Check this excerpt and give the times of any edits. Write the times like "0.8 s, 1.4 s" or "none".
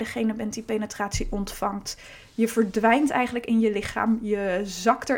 none